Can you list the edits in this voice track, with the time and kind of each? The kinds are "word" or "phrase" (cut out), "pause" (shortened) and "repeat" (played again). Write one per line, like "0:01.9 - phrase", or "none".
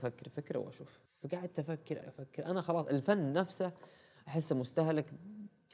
0:01.1 - pause
0:02.0 - word